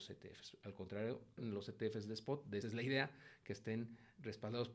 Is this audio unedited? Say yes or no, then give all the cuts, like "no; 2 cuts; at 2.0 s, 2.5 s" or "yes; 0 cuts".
no; 2 cuts; at 1.4 s, 2.6 s